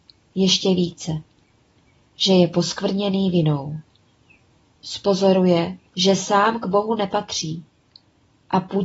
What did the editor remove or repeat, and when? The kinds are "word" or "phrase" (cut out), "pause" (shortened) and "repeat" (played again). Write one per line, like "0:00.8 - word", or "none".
0:05.9 - pause